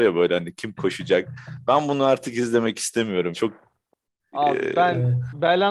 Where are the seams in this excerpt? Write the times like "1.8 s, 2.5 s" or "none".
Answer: 3.3 s